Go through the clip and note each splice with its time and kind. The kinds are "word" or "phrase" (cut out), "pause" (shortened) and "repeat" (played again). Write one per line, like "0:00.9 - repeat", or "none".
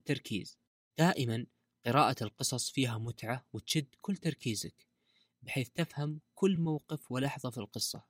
none